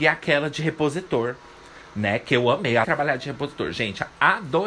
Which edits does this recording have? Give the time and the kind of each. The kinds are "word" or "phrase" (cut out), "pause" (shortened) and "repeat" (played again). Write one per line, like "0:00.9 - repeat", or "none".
0:02.8 - word